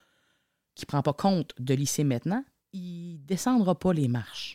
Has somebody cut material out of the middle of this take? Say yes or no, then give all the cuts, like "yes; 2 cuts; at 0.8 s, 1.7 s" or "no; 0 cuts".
yes; 1 cut; at 2.6 s